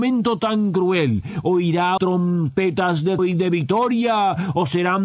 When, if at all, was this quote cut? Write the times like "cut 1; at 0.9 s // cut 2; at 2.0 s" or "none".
cut 1; at 2.0 s // cut 2; at 3.2 s